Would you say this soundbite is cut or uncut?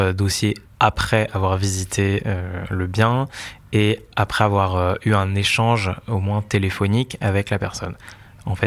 uncut